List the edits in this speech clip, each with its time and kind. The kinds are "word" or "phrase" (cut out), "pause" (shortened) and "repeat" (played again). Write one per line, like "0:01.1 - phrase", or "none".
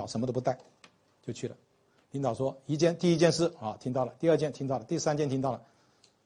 none